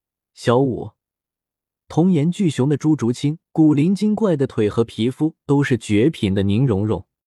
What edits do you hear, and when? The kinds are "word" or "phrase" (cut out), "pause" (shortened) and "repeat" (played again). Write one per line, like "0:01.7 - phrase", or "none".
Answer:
0:03.5 - pause